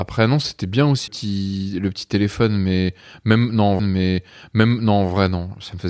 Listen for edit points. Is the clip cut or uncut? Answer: cut